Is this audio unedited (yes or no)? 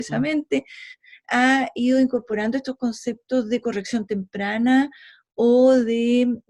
yes